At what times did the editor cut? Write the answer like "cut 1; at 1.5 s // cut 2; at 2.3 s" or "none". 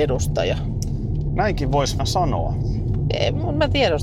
cut 1; at 2.0 s